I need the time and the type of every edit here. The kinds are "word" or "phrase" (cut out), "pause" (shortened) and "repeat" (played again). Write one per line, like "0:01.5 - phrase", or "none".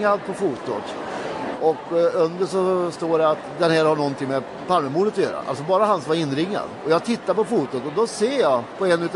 none